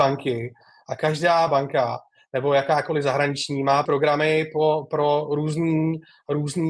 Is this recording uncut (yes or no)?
no